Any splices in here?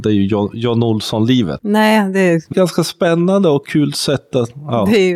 yes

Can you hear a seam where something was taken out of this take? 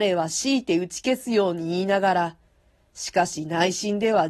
no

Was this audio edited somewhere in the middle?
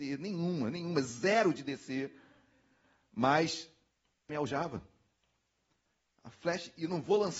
yes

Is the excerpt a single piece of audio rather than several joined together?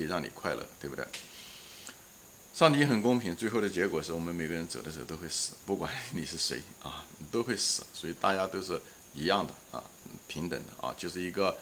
yes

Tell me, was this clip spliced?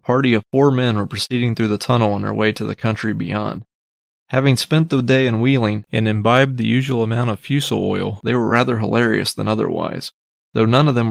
no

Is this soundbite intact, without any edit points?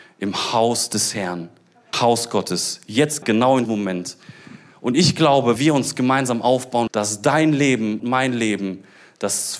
no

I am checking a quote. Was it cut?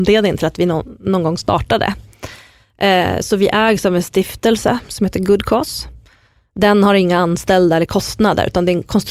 no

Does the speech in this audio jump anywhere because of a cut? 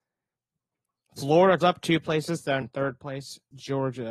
yes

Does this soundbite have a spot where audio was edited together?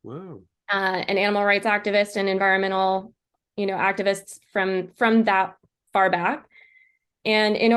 no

